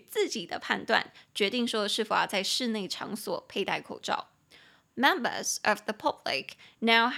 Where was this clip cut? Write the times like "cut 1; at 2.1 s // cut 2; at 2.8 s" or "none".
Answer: none